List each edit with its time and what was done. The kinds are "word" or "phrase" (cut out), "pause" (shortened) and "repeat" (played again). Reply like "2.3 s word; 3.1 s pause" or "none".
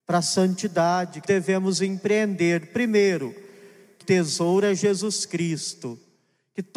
1.2 s word; 4.0 s word